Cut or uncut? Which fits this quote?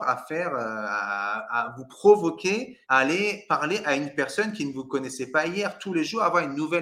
cut